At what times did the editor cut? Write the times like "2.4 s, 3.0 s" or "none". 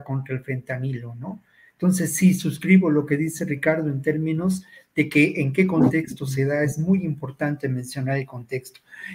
none